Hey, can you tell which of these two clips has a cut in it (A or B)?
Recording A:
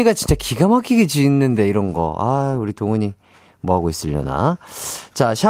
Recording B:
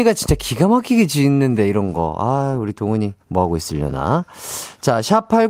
B